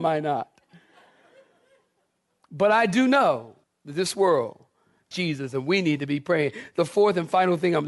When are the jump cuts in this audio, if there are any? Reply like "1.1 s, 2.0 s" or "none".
3.6 s, 5.1 s